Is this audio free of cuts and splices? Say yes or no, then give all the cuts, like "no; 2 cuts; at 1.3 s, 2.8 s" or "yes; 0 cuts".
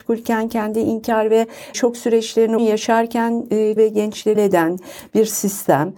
no; 4 cuts; at 1.7 s, 2.6 s, 3.8 s, 4.4 s